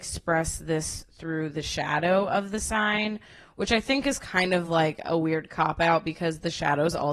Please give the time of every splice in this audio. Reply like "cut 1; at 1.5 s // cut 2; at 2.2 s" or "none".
none